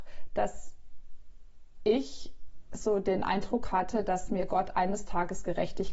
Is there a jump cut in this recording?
no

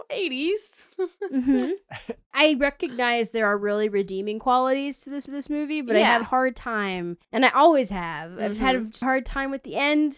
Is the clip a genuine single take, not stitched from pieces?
no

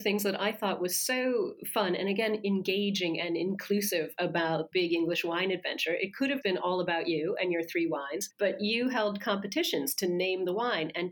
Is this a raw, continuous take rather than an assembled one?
no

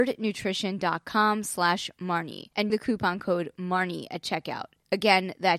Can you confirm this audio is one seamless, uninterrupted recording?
no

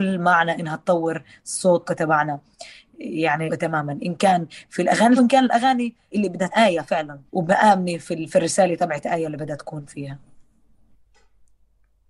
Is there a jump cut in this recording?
yes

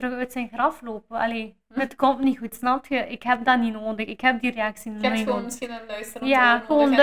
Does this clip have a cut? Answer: yes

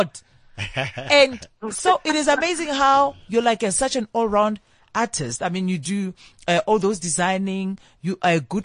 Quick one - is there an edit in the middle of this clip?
no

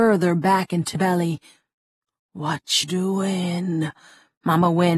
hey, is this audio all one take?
no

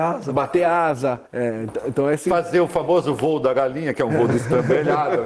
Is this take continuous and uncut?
no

